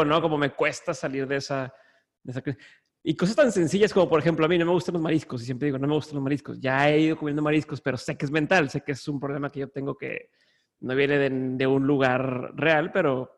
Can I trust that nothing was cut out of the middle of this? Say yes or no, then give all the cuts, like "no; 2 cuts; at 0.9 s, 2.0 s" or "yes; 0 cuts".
yes; 0 cuts